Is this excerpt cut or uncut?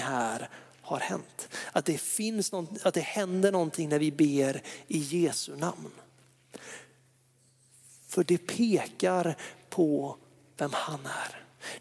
uncut